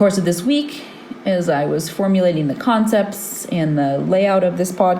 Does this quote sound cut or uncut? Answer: uncut